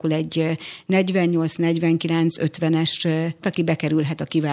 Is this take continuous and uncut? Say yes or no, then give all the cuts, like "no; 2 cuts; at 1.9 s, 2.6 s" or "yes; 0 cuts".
no; 1 cut; at 3.4 s